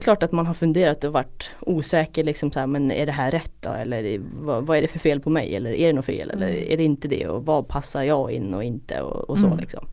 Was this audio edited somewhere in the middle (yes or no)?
no